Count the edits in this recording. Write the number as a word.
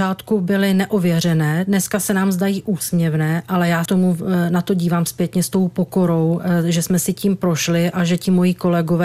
one